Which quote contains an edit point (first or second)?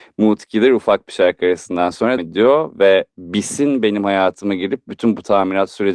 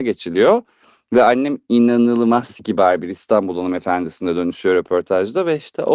first